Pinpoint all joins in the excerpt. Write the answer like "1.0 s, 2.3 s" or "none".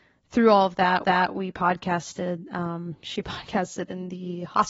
1.0 s

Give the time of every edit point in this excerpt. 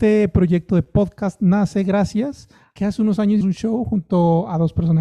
2.8 s, 3.4 s

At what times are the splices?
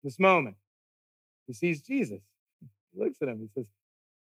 none

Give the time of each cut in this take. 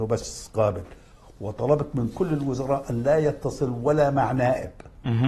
none

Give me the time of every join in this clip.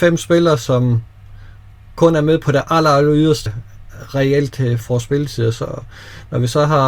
3.5 s, 4.8 s

